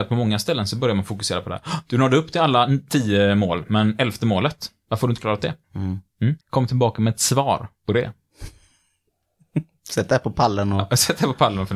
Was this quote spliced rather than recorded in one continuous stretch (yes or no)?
yes